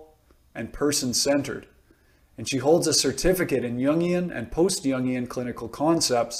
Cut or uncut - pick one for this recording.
uncut